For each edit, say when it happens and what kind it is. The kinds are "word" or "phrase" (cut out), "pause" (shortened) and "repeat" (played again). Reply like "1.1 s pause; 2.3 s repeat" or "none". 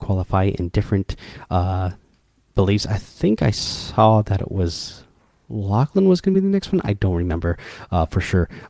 none